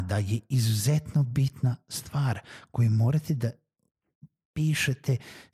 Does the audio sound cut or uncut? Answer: uncut